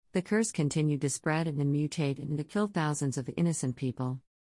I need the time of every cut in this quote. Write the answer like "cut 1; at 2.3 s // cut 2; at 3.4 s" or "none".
none